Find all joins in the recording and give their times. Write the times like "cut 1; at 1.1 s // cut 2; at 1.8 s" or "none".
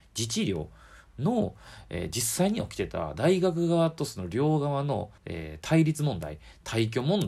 cut 1; at 5.2 s